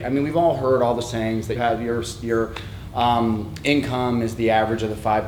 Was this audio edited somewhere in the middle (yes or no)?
yes